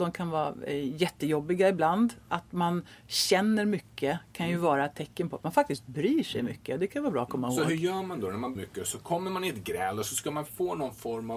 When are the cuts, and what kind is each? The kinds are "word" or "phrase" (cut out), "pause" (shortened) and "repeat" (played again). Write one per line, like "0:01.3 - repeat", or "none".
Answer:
0:08.5 - phrase
0:10.5 - word